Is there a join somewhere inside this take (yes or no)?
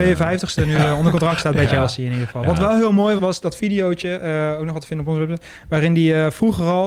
yes